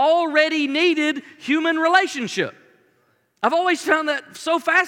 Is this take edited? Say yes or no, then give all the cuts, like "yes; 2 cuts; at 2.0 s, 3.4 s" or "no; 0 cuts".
no; 0 cuts